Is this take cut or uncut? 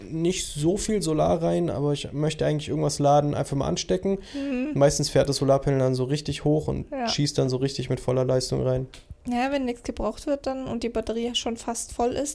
cut